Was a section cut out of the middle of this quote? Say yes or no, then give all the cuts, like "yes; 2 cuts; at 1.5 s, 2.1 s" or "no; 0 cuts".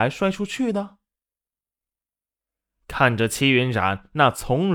no; 0 cuts